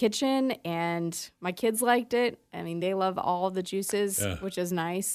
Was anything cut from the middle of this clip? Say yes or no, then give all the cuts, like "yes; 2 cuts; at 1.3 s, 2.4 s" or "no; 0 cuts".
no; 0 cuts